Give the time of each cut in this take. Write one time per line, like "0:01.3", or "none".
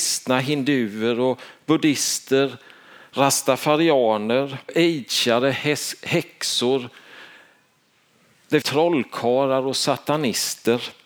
0:04.7
0:08.6